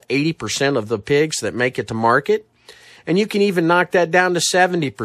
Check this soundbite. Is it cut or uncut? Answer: uncut